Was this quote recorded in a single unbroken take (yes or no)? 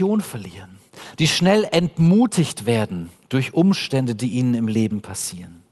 yes